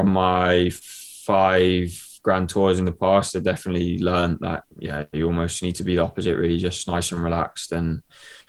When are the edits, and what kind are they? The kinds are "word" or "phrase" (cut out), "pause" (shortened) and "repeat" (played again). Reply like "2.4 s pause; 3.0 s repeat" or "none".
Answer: 4.7 s pause